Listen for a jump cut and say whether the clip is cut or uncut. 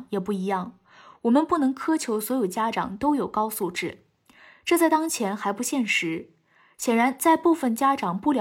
uncut